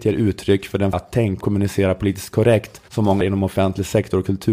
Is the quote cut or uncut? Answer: cut